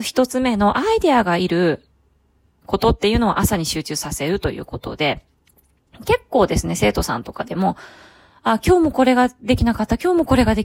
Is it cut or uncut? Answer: uncut